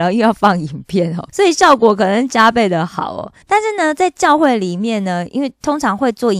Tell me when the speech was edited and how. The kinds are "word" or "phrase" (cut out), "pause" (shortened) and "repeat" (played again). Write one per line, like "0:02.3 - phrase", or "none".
0:01.3 - pause
0:03.4 - pause